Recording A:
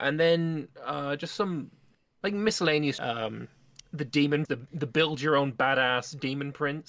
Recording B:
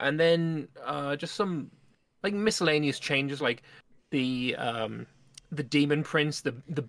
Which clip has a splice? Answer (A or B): A